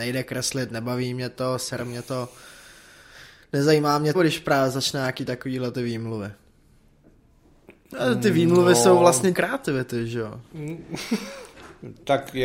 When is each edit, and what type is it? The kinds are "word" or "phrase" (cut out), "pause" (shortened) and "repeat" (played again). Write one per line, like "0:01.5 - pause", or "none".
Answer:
0:04.1 - phrase
0:09.3 - word